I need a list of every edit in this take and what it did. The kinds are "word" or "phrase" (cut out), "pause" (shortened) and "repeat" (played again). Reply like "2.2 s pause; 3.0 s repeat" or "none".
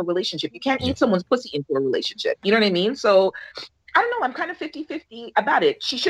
none